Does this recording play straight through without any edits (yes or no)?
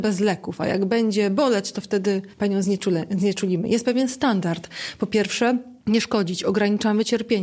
no